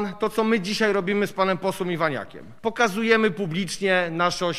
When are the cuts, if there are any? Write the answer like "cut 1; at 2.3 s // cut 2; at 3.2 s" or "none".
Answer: cut 1; at 2.6 s